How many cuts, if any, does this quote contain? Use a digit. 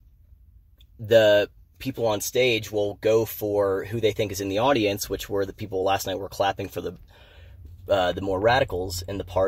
0